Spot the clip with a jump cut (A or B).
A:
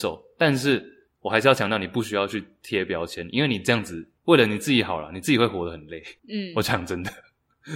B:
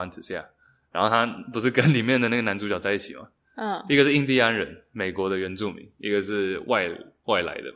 A